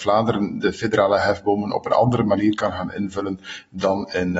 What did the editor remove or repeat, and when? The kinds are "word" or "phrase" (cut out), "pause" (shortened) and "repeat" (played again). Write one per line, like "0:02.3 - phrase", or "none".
none